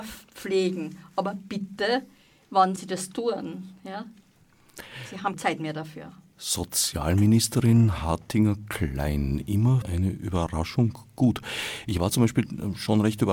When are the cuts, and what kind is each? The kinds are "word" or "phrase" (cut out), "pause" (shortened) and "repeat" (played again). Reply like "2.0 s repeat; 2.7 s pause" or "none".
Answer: 2.8 s word; 5.3 s word; 9.8 s word